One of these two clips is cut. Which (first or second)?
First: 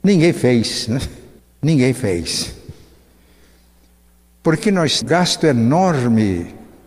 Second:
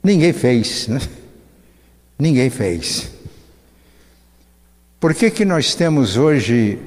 first